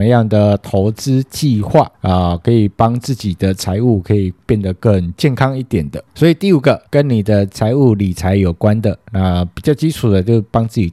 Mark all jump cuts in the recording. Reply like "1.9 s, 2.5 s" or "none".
1.9 s, 6.9 s

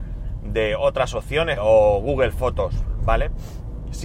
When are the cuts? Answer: 1.6 s

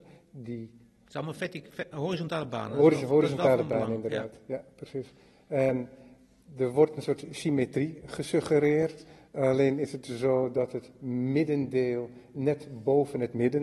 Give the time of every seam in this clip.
none

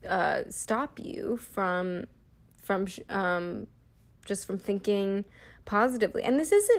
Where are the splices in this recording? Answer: none

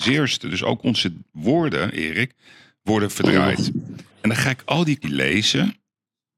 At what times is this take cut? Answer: 4.1 s, 5.0 s

